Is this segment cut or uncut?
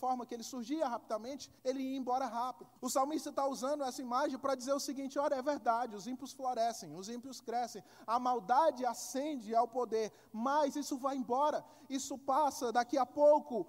cut